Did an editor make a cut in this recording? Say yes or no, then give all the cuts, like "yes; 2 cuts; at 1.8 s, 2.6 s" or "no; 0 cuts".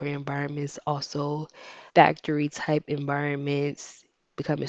yes; 1 cut; at 1.9 s